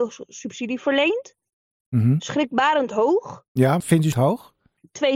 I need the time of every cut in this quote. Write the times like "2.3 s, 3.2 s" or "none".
3.8 s, 4.1 s